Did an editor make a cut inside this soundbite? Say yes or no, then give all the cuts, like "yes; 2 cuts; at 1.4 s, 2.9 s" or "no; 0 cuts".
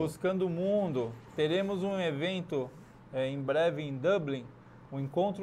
no; 0 cuts